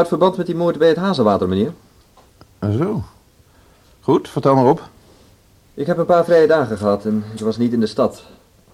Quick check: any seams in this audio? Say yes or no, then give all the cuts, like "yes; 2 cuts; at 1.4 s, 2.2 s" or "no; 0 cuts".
no; 0 cuts